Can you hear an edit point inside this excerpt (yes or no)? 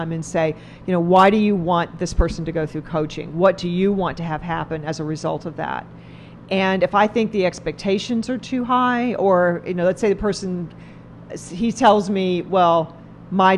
no